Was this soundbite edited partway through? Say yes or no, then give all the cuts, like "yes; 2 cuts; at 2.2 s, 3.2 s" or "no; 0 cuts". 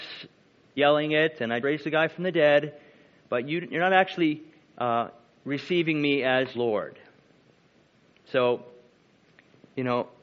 yes; 2 cuts; at 1.6 s, 6.5 s